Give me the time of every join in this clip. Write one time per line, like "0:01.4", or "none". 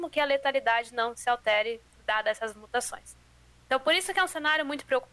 none